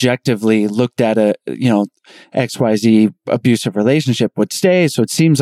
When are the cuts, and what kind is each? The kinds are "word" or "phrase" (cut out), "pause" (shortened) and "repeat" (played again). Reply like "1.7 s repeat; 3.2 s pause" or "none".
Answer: none